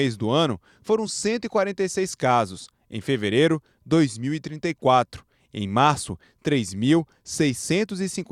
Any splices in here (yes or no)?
no